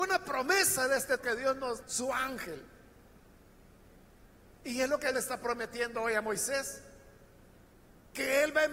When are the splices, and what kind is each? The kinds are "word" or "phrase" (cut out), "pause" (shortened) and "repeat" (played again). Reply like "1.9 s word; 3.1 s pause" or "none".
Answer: 1.2 s word; 1.8 s word; 5.1 s word